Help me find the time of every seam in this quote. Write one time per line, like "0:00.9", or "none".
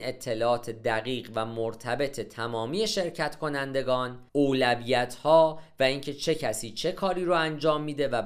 0:04.3